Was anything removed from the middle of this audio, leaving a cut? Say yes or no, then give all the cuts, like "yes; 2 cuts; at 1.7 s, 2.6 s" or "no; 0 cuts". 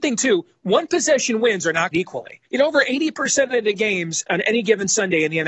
yes; 2 cuts; at 1.9 s, 2.5 s